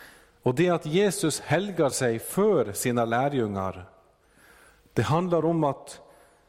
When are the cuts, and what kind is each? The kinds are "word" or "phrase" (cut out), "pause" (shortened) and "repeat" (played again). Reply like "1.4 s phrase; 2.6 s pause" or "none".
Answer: none